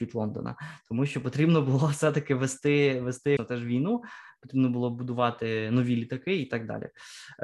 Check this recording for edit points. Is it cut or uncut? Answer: cut